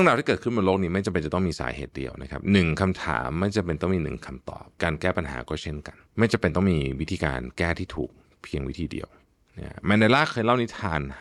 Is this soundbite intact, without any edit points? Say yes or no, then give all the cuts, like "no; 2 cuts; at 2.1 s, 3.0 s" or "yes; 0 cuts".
no; 1 cut; at 6.1 s